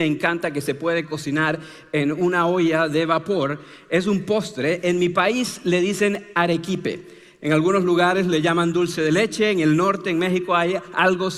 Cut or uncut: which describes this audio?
uncut